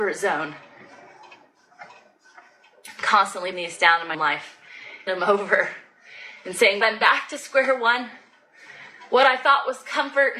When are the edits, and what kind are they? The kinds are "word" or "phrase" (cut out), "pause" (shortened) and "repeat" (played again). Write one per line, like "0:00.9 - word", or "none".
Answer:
0:03.5 - word
0:04.1 - word
0:05.1 - word
0:06.8 - word